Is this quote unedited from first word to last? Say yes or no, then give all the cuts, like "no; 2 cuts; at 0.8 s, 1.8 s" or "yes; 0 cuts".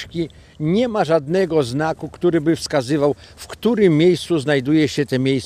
yes; 0 cuts